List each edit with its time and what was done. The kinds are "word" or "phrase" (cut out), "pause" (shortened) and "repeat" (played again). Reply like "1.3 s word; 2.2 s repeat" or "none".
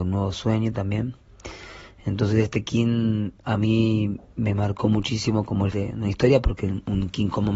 5.7 s word